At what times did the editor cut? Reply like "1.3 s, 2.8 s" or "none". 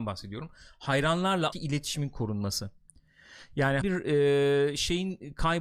1.5 s, 3.8 s